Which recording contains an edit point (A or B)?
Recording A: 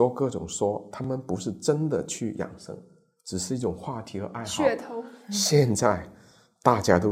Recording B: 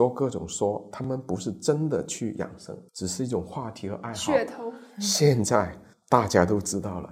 B